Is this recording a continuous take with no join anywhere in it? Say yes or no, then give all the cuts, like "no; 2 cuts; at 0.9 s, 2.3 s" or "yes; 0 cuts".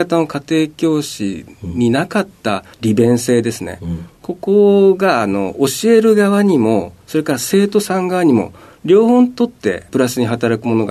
no; 1 cut; at 2.7 s